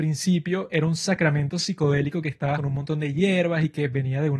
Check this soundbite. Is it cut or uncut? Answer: cut